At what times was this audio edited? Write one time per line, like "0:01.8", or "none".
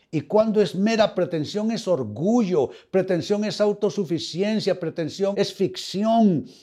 0:01.1
0:05.3